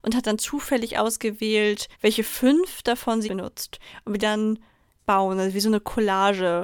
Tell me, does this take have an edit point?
yes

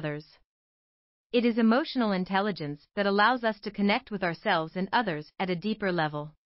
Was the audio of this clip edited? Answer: no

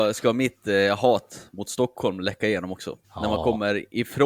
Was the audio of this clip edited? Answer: yes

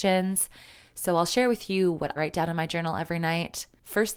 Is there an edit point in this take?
yes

